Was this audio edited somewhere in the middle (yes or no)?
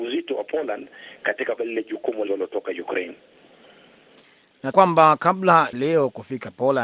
yes